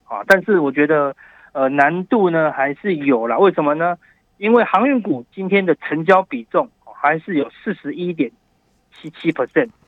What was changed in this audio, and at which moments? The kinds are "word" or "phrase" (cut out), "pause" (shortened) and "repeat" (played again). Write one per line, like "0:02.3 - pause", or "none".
0:06.7 - pause